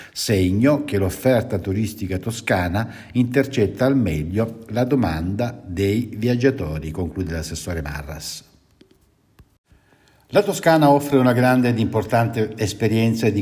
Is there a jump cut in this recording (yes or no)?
no